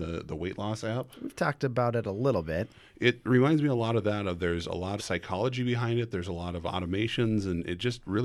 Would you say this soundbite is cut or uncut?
cut